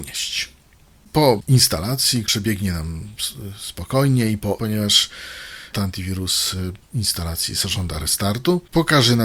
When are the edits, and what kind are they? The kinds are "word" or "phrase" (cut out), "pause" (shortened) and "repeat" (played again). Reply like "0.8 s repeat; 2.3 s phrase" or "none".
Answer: 2.3 s word; 4.6 s phrase; 5.7 s word; 6.8 s word